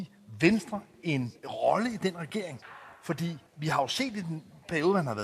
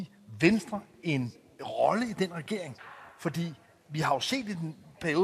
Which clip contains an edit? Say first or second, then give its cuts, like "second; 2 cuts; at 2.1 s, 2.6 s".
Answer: first; 2 cuts; at 1.4 s, 3.5 s